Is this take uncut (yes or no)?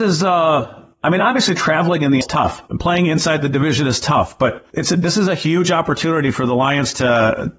no